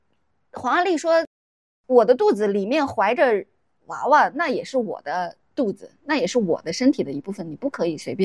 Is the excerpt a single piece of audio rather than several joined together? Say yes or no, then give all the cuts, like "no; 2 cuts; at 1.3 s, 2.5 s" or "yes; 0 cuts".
yes; 0 cuts